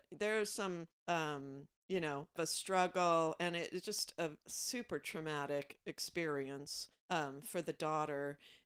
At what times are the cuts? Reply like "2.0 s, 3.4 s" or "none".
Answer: 0.9 s, 2.4 s, 7.0 s